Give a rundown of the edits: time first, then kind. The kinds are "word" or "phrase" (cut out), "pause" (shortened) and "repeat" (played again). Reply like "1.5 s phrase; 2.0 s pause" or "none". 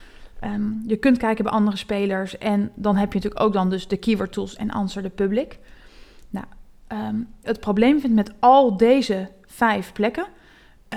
7.4 s phrase